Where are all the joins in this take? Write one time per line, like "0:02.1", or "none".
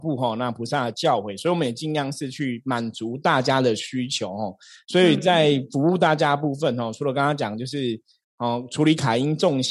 none